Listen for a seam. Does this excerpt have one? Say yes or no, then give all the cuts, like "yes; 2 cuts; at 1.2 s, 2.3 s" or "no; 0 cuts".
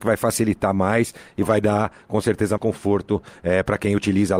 yes; 1 cut; at 2.6 s